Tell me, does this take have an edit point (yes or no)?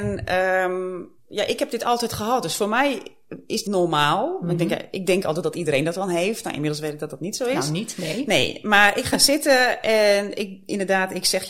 yes